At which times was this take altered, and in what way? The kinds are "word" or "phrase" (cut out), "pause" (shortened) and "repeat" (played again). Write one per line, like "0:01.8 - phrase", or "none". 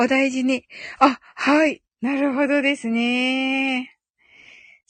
0:01.9 - pause